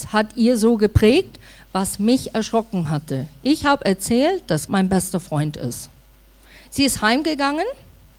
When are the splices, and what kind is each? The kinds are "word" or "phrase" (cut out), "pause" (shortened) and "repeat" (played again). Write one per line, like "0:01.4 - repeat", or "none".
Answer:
0:04.7 - word

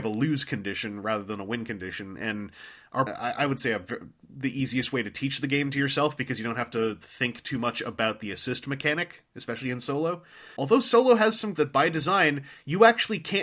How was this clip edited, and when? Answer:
0:03.1 - word
0:10.6 - word
0:11.6 - word

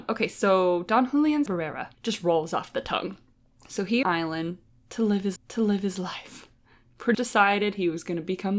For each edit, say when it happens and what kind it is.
0:01.5 - word
0:01.9 - pause
0:03.3 - pause
0:04.0 - phrase
0:05.4 - repeat
0:07.1 - word

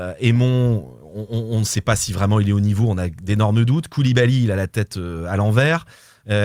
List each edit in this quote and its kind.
none

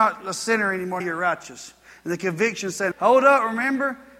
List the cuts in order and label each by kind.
0:01.0 - word
0:02.9 - word

